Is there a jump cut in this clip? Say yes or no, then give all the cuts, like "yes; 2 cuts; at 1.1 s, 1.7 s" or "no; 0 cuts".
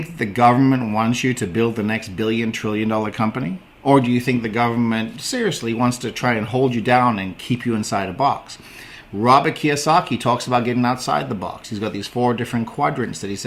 no; 0 cuts